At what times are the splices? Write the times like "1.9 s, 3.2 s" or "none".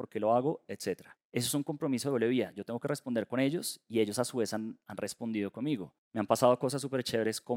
1.2 s, 6.0 s